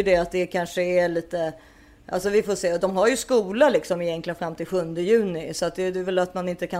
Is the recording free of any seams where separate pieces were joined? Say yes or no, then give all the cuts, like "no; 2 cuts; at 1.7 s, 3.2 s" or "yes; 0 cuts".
yes; 0 cuts